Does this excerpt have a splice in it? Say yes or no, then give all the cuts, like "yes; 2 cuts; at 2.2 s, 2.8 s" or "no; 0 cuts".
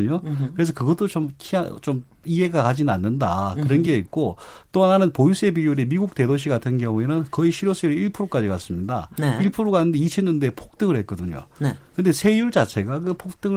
no; 0 cuts